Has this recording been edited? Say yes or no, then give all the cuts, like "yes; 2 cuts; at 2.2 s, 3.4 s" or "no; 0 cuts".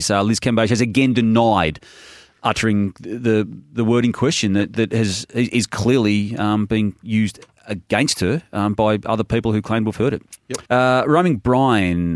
yes; 1 cut; at 10.7 s